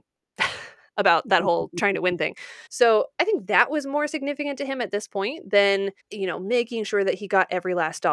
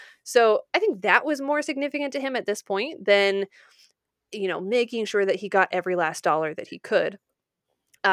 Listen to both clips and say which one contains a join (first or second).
first